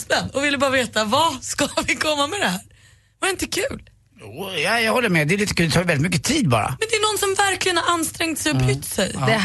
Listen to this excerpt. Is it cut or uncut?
uncut